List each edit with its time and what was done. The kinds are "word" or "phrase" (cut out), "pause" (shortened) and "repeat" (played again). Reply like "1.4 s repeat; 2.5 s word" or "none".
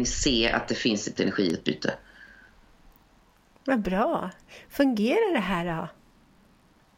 1.2 s word